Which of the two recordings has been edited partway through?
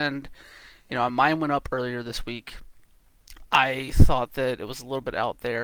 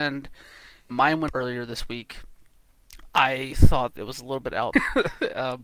second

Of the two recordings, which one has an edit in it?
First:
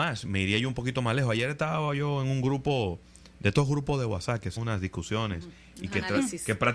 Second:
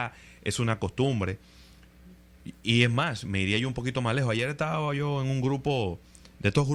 first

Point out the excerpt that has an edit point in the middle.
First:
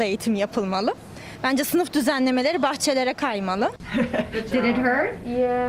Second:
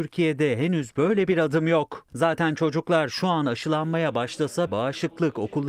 second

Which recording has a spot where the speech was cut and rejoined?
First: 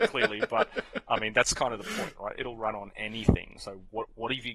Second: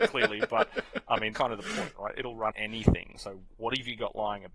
second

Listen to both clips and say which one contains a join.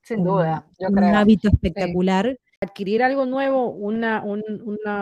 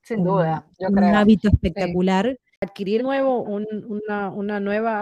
second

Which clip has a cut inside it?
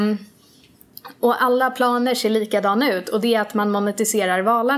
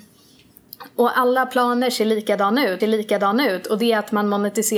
second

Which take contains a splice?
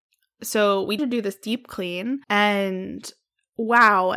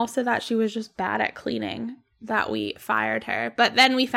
first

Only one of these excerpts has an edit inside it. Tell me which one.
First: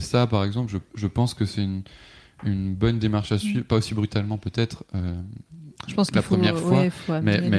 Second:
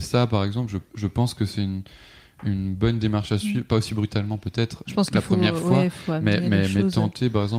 second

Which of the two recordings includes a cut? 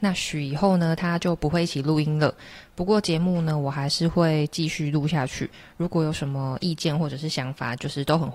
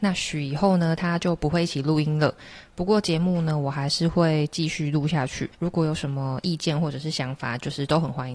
second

